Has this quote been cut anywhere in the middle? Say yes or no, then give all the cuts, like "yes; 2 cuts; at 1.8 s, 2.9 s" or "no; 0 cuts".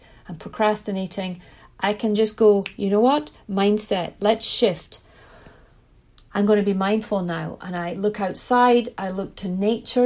no; 0 cuts